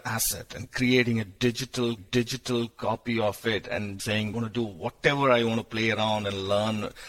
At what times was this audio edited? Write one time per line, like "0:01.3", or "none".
0:02.0
0:04.0
0:04.3